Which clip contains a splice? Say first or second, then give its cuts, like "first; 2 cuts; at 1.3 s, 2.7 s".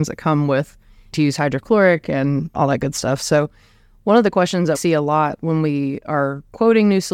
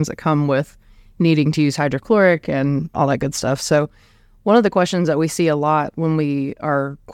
first; 2 cuts; at 1.1 s, 4.7 s